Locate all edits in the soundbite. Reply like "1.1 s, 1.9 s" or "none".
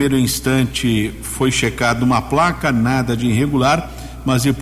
none